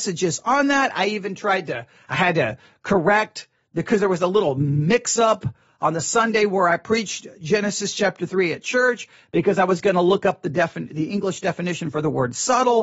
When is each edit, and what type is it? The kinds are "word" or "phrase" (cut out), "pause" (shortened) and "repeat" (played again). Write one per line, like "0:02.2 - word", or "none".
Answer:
none

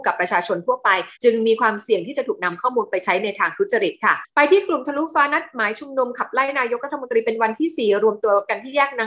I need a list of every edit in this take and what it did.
0:01.1 - pause

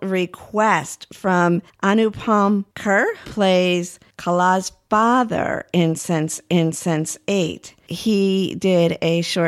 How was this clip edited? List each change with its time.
0:03.2 - word
0:06.5 - repeat

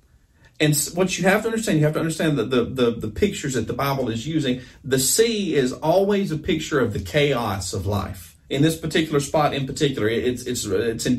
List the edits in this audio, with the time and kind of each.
0:08.4 - pause

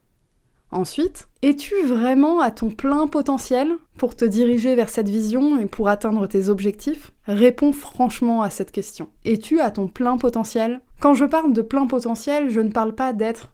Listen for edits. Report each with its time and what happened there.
0:01.3 - pause
0:03.9 - pause
0:07.2 - pause
0:09.2 - pause
0:10.9 - pause

